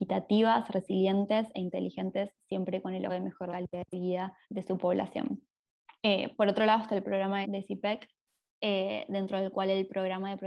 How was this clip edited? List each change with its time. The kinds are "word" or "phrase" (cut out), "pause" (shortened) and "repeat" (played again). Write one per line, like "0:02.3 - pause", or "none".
0:03.1 - word
0:03.5 - word
0:04.4 - pause
0:06.0 - pause
0:07.4 - phrase